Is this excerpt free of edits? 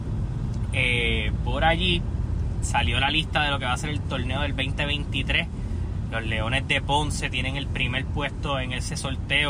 no; 1 cut; at 2.6 s

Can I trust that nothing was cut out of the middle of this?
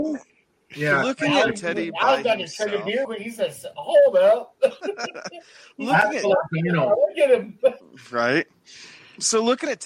no; 1 cut; at 3.0 s

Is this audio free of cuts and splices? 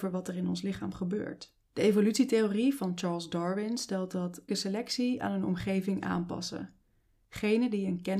no; 2 cuts; at 1.6 s, 4.5 s

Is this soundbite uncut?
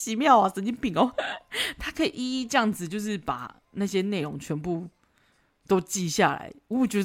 yes; 0 cuts

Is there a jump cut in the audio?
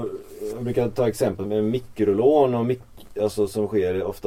yes; 1 cut; at 1.4 s

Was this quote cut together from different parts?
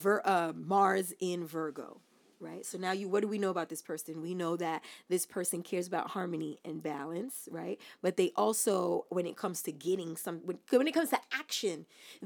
no; 0 cuts

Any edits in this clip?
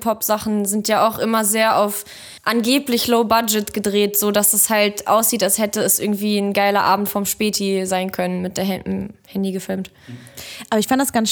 yes; 1 cut; at 2.4 s

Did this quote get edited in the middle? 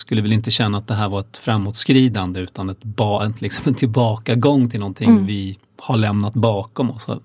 no; 0 cuts

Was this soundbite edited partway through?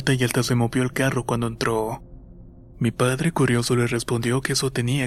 no; 0 cuts

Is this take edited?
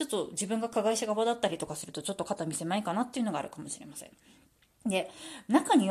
no; 0 cuts

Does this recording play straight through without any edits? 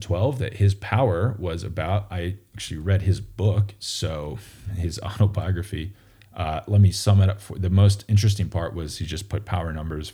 yes; 0 cuts

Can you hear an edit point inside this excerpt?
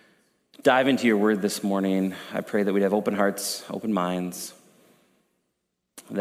no; 0 cuts

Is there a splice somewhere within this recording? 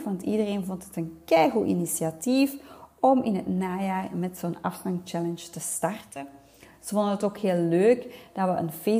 no; 0 cuts

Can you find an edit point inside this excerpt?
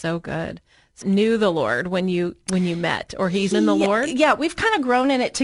yes; 2 cuts; at 1.0 s, 3.5 s

